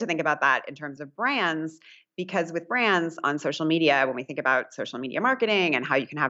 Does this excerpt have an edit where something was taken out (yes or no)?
no